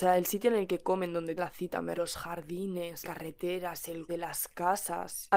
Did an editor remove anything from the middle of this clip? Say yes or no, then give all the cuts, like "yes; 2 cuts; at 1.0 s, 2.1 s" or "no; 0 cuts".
yes; 4 cuts; at 1.4 s, 2.0 s, 3.0 s, 4.1 s